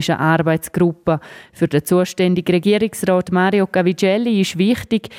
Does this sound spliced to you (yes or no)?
no